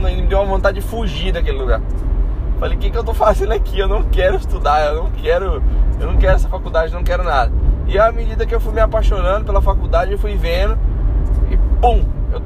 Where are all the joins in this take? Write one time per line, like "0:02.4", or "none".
none